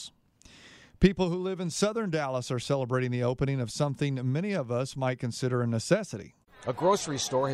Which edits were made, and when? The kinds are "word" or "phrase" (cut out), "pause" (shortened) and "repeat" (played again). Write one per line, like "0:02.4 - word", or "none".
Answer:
none